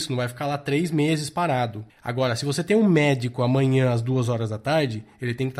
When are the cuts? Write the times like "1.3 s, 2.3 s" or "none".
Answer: 1.9 s

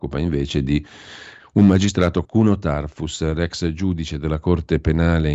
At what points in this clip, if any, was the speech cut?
2.2 s

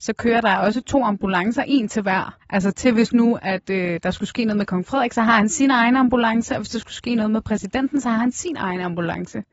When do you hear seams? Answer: 2.4 s

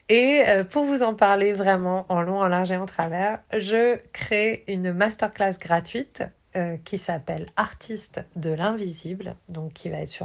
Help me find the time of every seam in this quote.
none

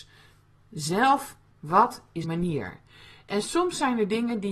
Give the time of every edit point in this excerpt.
1.5 s, 2.2 s

